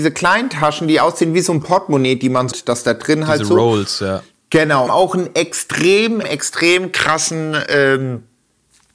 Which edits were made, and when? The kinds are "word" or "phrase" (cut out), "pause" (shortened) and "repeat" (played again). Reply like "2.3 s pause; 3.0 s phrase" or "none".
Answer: 2.5 s word; 4.9 s phrase; 6.2 s word